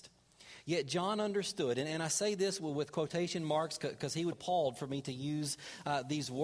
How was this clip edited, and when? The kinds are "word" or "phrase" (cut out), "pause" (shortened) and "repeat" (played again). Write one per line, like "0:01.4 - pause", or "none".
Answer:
0:04.3 - word